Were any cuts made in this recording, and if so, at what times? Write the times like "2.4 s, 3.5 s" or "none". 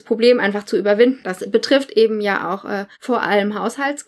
2.9 s